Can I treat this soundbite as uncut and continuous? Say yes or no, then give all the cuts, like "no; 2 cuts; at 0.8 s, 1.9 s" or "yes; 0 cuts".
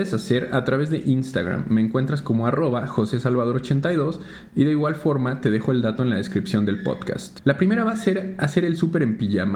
yes; 0 cuts